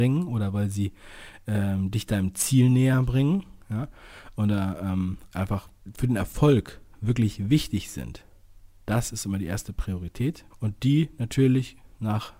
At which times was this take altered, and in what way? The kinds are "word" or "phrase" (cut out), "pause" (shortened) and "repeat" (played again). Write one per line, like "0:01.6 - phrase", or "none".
0:10.5 - pause